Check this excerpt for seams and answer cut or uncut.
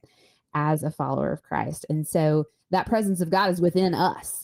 uncut